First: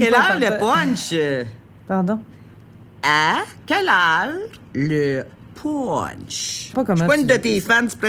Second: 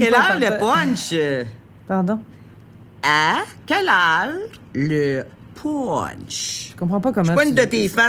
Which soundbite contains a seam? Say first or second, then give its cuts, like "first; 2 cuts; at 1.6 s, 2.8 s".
first; 1 cut; at 6.7 s